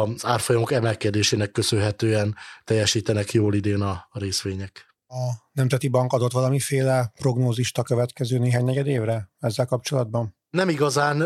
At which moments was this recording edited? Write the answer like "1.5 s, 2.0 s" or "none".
none